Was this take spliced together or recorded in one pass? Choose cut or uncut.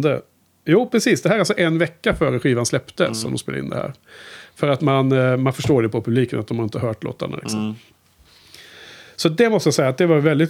uncut